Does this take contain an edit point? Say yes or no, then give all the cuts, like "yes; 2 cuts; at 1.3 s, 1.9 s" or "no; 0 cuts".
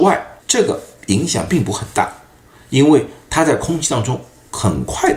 no; 0 cuts